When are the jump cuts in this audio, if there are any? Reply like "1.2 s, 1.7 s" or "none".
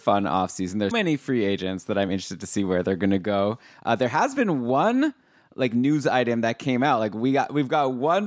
0.9 s